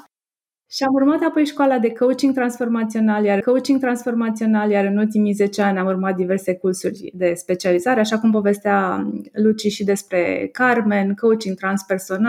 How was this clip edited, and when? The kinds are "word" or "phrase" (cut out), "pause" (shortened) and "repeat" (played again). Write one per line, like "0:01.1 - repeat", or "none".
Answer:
0:03.4 - repeat